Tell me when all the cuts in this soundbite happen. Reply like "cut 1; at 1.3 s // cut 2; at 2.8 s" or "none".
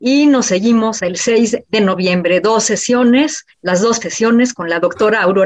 cut 1; at 1.0 s // cut 2; at 3.5 s // cut 3; at 4.0 s